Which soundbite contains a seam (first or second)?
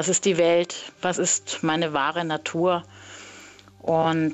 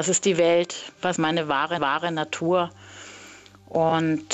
second